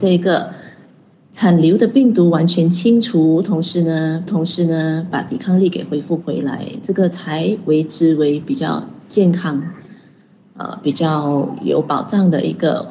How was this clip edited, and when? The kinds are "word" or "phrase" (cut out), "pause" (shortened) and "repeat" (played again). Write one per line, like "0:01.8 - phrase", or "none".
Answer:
0:04.3 - repeat